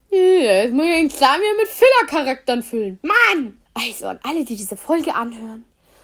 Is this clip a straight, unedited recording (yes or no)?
no